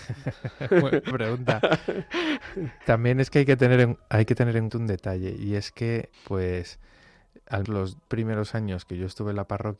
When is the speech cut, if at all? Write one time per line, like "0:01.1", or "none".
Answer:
0:01.1
0:02.8
0:04.7
0:06.1
0:07.6
0:08.1

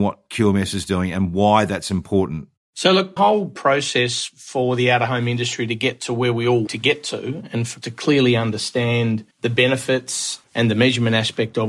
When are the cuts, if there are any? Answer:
0:03.2
0:06.7
0:07.8
0:09.3

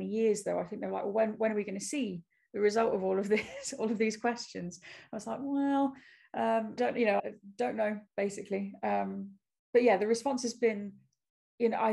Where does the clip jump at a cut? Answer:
0:06.8
0:07.2

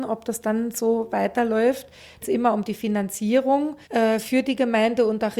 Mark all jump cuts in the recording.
0:02.2
0:03.8

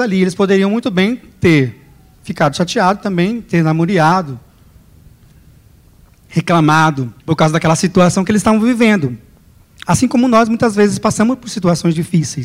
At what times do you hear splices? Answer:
0:07.2

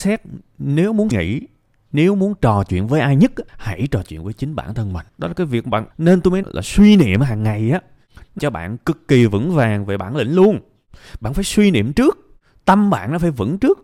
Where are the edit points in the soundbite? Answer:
0:01.1
0:03.5
0:05.1
0:05.9
0:06.4
0:08.4

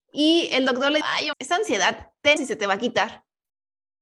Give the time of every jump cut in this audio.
0:01.0
0:01.3
0:02.4

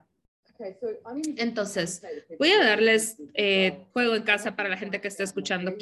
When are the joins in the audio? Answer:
0:03.9

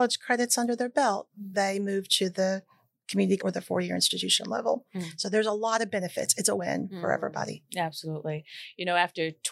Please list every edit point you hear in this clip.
0:01.5
0:03.4
0:06.6

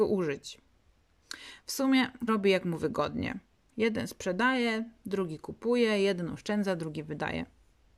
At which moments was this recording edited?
0:02.3

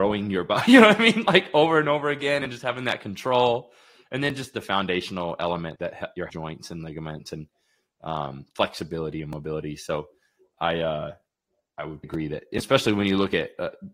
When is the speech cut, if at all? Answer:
0:05.8
0:06.3
0:12.0

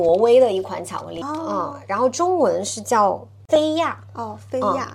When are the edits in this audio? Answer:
0:01.2

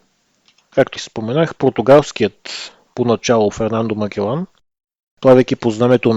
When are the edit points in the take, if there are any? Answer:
0:01.0
0:03.5

